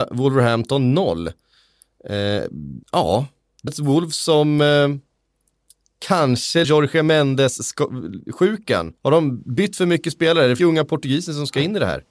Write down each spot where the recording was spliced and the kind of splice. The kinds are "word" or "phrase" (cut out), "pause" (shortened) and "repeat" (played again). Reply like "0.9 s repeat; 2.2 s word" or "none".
2.8 s pause; 3.7 s word; 6.6 s phrase; 9.0 s pause; 10.6 s word

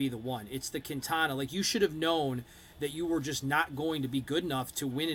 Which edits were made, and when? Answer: none

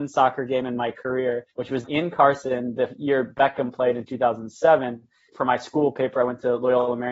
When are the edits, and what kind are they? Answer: 1.5 s pause; 1.8 s word; 5.3 s word

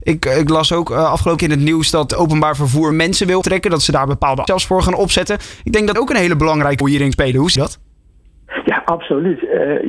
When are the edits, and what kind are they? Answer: 1.4 s word; 2.1 s word; 2.9 s word; 3.4 s word; 4.5 s word; 6.0 s word; 6.8 s word; 7.1 s word; 7.6 s word

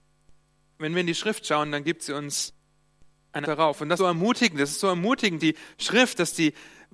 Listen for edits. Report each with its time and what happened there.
3.4 s word; 4.0 s word; 5.4 s word

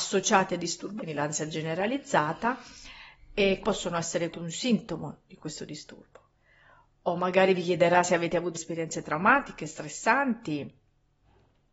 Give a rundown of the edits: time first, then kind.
1.0 s word; 3.6 s word; 4.3 s word; 8.5 s word

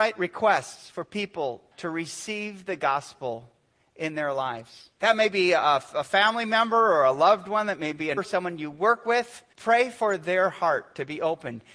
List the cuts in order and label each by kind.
1.7 s pause; 5.0 s pause; 8.2 s word; 9.5 s pause

